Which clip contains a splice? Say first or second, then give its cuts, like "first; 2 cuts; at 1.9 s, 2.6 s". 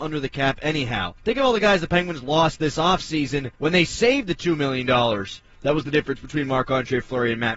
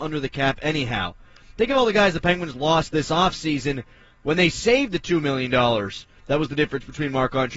first; 2 cuts; at 1.2 s, 3.6 s